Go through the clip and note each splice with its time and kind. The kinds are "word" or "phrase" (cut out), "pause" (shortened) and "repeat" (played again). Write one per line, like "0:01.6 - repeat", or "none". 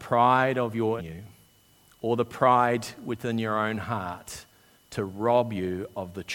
0:01.0 - phrase